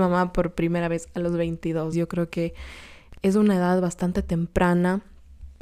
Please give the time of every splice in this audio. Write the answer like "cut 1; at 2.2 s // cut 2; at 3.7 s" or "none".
cut 1; at 1.9 s

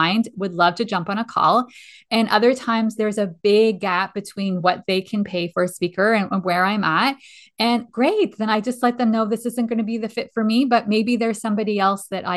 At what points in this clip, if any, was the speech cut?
none

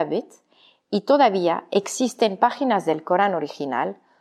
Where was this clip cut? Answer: none

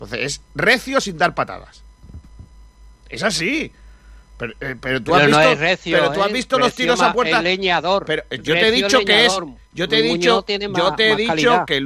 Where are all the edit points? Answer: none

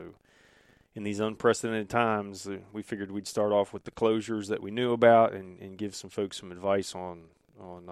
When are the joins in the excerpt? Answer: none

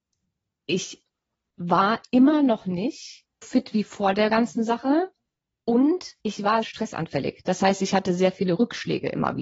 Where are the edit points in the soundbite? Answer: cut 1; at 3.4 s // cut 2; at 6.2 s // cut 3; at 6.6 s

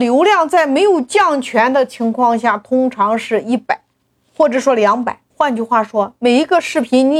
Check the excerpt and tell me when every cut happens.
cut 1; at 4.1 s // cut 2; at 5.3 s

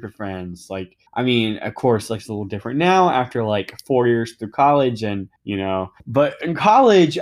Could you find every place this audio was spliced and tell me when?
cut 1; at 1.1 s // cut 2; at 5.4 s // cut 3; at 6.0 s

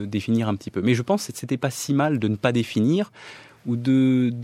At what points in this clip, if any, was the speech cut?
none

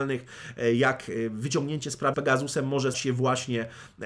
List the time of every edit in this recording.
cut 1; at 2.1 s // cut 2; at 2.9 s

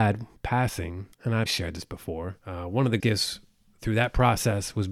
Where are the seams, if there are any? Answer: cut 1; at 1.1 s // cut 2; at 1.5 s // cut 3; at 2.4 s // cut 4; at 3.0 s

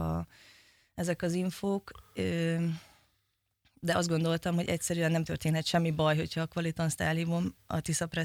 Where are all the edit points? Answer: none

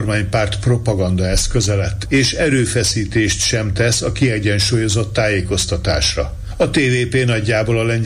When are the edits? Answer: none

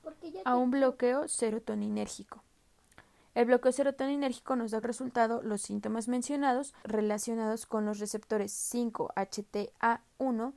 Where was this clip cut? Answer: cut 1; at 4.8 s // cut 2; at 6.8 s

